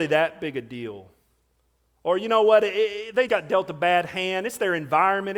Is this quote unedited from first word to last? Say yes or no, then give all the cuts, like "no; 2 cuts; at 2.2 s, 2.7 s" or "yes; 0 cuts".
no; 1 cut; at 3.3 s